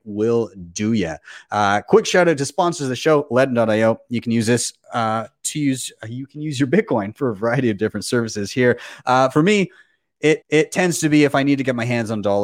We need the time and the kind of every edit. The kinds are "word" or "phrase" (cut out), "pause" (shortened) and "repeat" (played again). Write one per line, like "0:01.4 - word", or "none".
0:10.4 - repeat